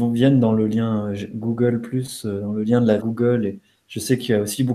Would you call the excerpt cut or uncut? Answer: cut